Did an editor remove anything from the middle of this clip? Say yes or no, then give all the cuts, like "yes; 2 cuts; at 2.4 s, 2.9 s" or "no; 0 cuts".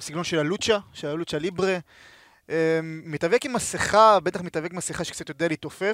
no; 0 cuts